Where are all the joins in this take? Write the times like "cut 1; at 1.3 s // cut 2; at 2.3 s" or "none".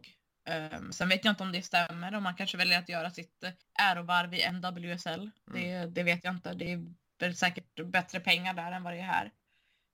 cut 1; at 3.6 s